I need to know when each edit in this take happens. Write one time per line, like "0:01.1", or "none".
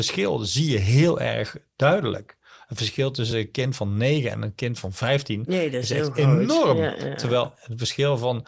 none